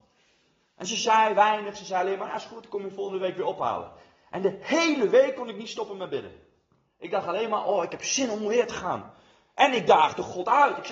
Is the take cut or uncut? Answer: uncut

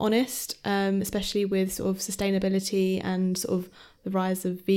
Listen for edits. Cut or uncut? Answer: uncut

